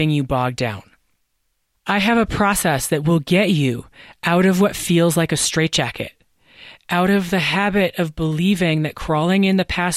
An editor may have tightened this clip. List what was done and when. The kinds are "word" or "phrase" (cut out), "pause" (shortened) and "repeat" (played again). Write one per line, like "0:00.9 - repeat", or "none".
none